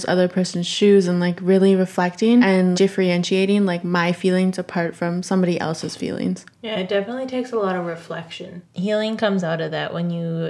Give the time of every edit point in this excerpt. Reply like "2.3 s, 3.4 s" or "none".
2.7 s

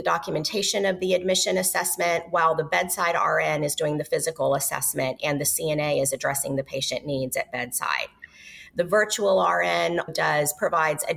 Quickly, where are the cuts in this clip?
10.1 s

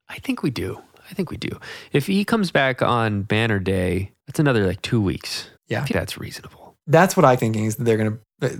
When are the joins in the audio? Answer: 4.2 s, 5.6 s, 5.9 s, 6.8 s, 7.4 s

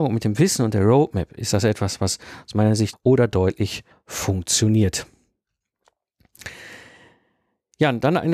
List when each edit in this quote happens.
2.9 s, 3.9 s

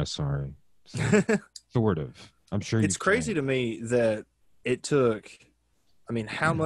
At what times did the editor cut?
none

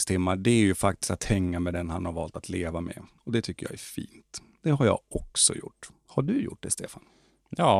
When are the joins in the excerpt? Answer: none

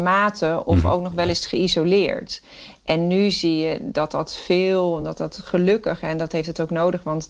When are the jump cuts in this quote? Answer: none

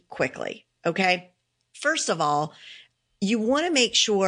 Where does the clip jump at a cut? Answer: none

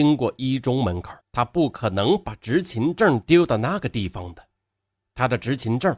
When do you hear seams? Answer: 1.2 s

